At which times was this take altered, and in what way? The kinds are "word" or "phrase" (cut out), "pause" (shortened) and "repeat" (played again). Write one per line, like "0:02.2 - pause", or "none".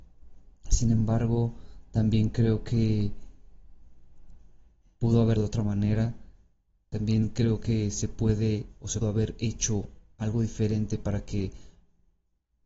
0:05.4 - word
0:09.0 - word